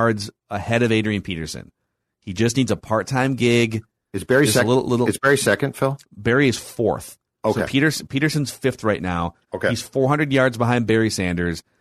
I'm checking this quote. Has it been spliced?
yes; 1 cut; at 6.1 s

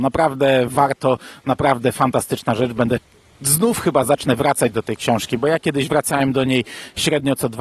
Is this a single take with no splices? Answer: yes; 0 cuts

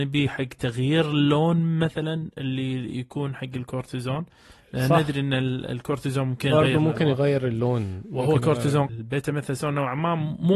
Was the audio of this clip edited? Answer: yes; 1 cut; at 8.9 s

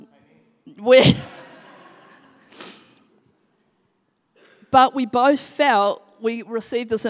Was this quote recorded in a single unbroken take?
yes; 0 cuts

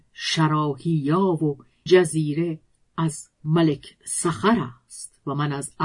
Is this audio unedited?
no; 1 cut; at 1.9 s

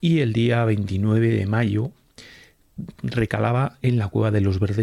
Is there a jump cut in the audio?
no; 0 cuts

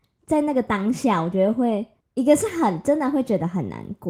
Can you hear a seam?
yes; 1 cut; at 2.0 s

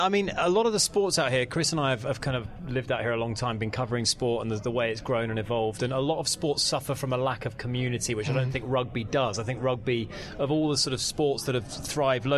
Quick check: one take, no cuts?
yes; 0 cuts

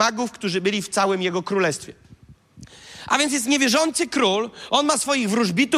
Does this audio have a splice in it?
no; 0 cuts

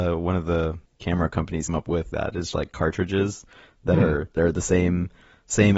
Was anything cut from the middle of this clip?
yes; 4 cuts; at 1.7 s, 2.1 s, 2.5 s, 4.4 s

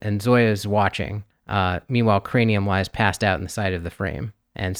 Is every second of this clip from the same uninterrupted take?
no; 1 cut; at 1.3 s

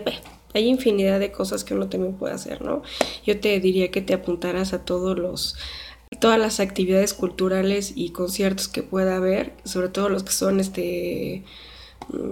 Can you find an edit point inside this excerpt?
no; 0 cuts

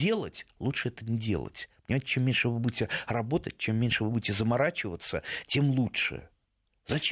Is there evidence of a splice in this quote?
no; 0 cuts

